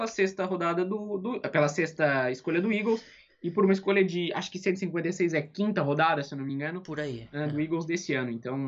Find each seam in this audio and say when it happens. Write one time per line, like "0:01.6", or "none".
none